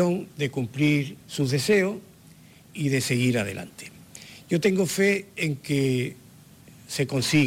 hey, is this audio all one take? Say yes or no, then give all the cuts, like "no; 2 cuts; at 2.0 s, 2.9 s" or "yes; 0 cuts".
no; 1 cut; at 1.2 s